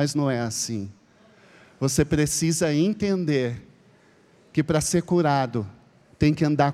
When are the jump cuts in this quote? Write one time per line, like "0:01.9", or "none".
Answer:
none